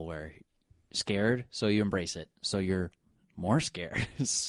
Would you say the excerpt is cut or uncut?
uncut